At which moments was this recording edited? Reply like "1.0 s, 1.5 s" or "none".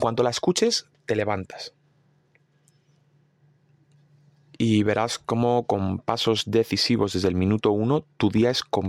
none